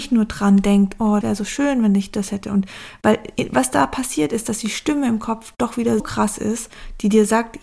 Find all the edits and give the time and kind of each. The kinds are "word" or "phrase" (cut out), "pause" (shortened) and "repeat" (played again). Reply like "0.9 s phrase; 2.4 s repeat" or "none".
1.2 s word; 6.0 s word

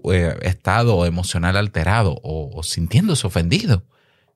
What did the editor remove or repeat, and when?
2.2 s word

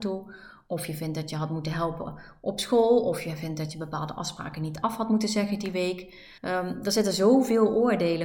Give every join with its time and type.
6.4 s pause

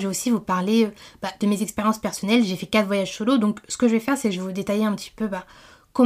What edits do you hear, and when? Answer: none

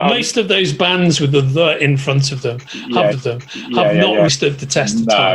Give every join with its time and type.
3.1 s repeat; 4.3 s word

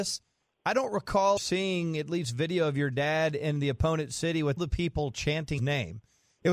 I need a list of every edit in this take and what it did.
1.4 s word; 4.6 s word; 5.6 s word

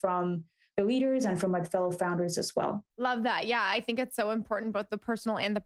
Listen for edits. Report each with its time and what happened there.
2.9 s pause

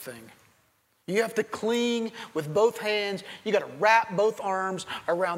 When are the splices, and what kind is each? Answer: none

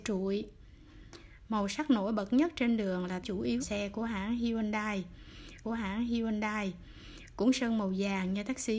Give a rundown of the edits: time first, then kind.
3.2 s phrase; 3.6 s word; 5.6 s repeat

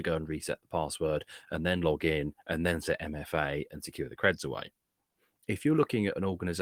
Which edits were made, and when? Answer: none

